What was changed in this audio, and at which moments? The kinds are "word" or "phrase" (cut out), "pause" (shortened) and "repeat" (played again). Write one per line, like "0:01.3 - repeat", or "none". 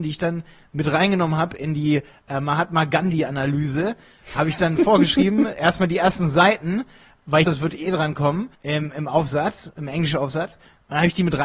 0:07.4 - phrase
0:08.5 - pause